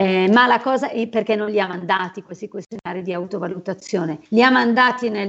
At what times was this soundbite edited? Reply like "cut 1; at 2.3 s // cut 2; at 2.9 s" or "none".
cut 1; at 4.3 s